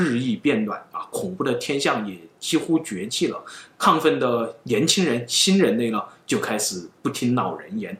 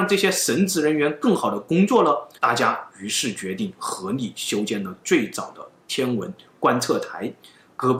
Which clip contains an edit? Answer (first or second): second